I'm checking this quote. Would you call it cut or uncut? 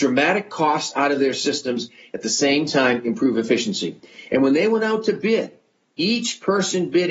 uncut